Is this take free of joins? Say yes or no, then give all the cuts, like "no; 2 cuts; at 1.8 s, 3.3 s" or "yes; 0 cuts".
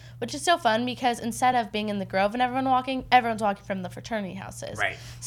yes; 0 cuts